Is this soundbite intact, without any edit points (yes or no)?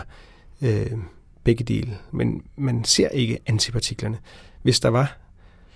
yes